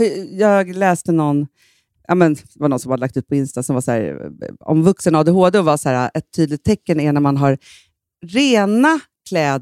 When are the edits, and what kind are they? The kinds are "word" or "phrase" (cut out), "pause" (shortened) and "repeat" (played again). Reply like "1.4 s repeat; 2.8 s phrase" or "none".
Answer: none